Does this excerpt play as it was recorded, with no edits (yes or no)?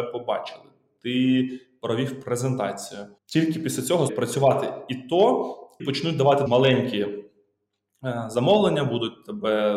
no